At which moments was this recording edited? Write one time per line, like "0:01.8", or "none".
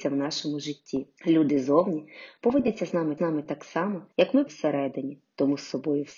0:01.2
0:03.2
0:04.1
0:04.5